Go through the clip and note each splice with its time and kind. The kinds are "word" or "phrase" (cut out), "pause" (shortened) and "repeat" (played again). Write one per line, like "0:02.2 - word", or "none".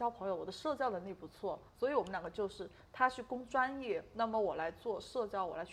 0:01.7 - pause